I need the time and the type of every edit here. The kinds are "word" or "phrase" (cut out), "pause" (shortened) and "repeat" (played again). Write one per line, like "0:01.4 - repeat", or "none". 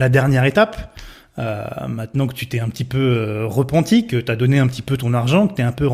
none